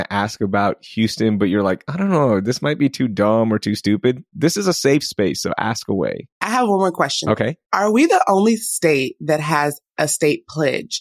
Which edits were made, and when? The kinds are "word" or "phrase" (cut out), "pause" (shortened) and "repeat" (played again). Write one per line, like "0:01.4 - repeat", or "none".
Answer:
0:06.4 - pause